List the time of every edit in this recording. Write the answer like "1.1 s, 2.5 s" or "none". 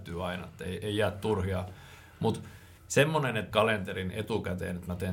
2.8 s, 3.5 s